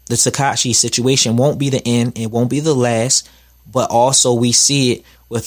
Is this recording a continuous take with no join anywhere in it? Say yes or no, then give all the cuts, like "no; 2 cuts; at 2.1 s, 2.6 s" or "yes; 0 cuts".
yes; 0 cuts